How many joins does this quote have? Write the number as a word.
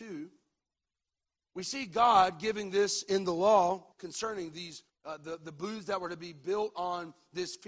two